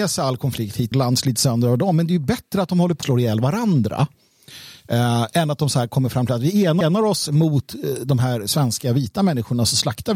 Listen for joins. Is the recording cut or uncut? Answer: cut